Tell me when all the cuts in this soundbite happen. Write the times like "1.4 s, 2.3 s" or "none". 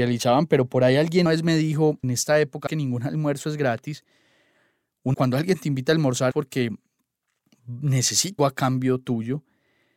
1.3 s, 2.0 s, 2.7 s, 5.1 s, 6.3 s, 8.4 s